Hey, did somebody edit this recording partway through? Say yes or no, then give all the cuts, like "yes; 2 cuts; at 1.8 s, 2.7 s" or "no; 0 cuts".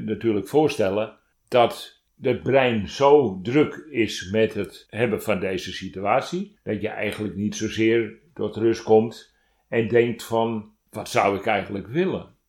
no; 0 cuts